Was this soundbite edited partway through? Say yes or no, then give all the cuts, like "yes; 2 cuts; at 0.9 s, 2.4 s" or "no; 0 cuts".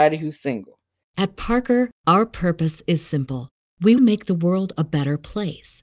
yes; 1 cut; at 4.0 s